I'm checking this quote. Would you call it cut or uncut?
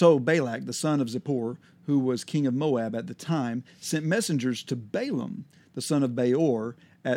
uncut